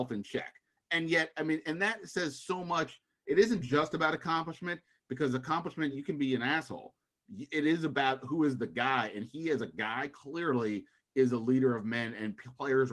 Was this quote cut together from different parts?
no; 0 cuts

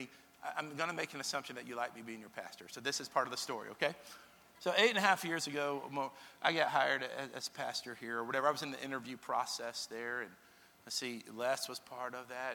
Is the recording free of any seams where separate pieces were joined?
yes; 0 cuts

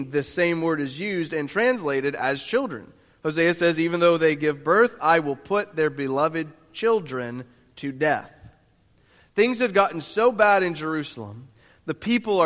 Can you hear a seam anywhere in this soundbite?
no; 0 cuts

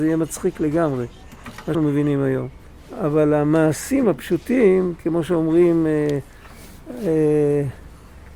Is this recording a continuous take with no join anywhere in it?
no; 2 cuts; at 1.7 s, 2.6 s

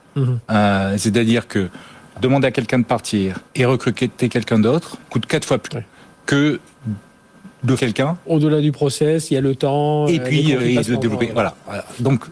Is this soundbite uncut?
no; 6 cuts; at 2.2 s, 3.5 s, 5.0 s, 5.6 s, 7.8 s, 10.6 s

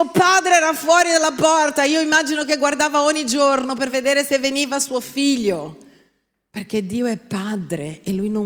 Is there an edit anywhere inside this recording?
no; 0 cuts

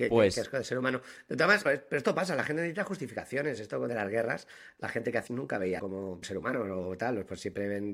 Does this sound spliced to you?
yes; 5 cuts; at 1.7 s, 3.9 s, 5.3 s, 5.8 s, 6.2 s

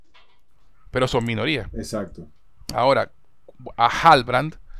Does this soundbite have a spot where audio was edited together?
no; 0 cuts

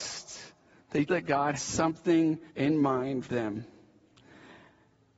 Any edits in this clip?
yes; 4 cuts; at 1.1 s, 1.6 s, 2.5 s, 3.2 s

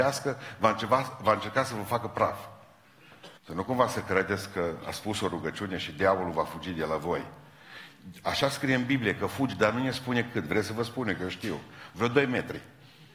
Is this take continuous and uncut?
no; 1 cut; at 3.4 s

